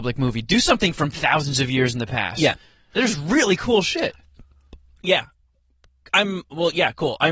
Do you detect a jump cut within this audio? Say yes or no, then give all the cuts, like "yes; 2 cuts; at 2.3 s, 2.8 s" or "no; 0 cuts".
no; 0 cuts